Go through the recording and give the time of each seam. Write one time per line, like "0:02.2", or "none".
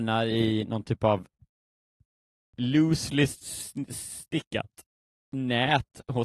none